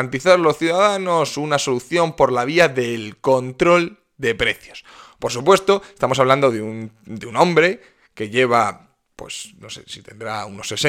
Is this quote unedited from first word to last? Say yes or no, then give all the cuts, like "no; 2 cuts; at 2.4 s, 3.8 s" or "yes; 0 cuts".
yes; 0 cuts